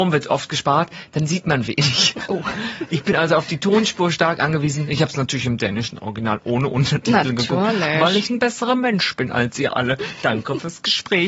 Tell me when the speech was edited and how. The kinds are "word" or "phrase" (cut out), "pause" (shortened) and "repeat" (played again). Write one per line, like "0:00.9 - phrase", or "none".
none

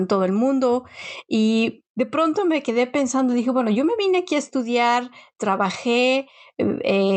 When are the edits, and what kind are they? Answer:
none

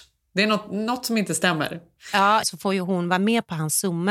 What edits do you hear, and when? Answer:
0:02.4 - phrase

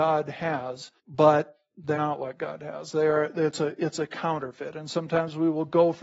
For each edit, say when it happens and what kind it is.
0:01.0 - pause
0:01.9 - word

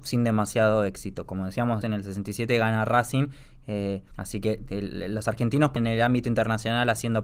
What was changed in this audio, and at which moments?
0:01.8 - word
0:04.1 - pause
0:05.8 - phrase

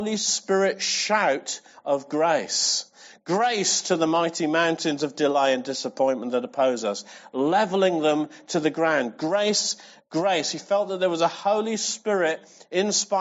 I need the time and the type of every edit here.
none

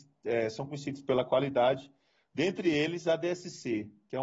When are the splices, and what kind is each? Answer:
none

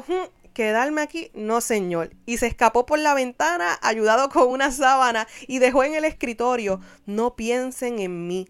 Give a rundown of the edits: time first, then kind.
none

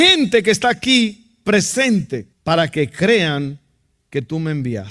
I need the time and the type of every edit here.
0:02.3 - pause

